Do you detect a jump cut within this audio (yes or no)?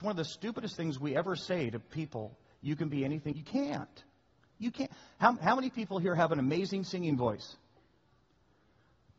yes